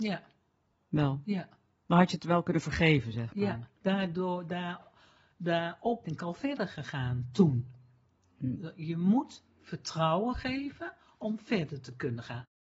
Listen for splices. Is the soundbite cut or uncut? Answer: cut